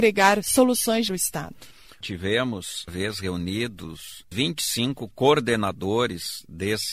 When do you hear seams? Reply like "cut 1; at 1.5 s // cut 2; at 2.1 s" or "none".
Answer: cut 1; at 1.1 s // cut 2; at 2.9 s // cut 3; at 4.3 s